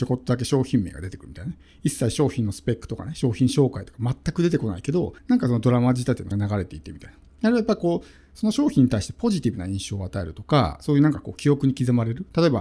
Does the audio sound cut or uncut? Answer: cut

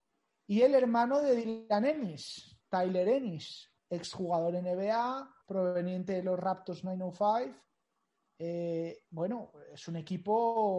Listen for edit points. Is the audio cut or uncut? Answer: cut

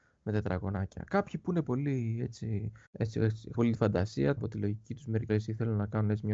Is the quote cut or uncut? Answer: cut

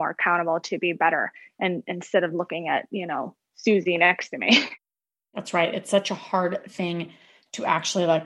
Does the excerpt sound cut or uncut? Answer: uncut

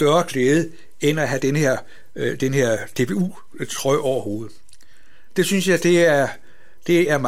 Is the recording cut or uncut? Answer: uncut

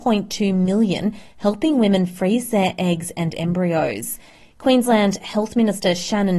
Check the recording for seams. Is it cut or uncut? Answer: uncut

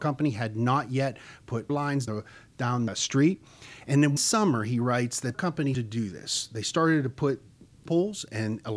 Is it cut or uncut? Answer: cut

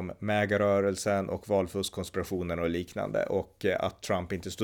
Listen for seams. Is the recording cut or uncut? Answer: uncut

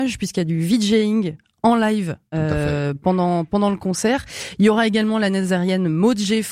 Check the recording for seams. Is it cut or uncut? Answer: uncut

